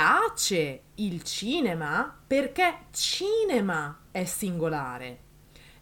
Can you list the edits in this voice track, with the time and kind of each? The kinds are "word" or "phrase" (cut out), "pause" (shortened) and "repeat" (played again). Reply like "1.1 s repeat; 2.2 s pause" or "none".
none